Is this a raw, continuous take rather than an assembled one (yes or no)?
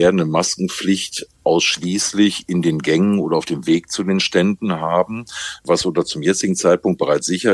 yes